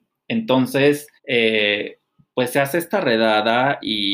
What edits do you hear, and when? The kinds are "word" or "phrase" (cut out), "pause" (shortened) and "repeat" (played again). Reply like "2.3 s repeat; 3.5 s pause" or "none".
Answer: 1.2 s pause